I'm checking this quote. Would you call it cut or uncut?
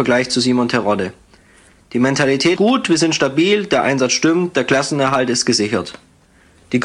cut